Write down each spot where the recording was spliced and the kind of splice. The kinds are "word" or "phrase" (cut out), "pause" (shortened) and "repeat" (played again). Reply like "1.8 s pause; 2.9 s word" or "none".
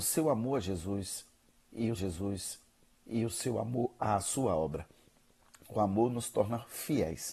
2.0 s repeat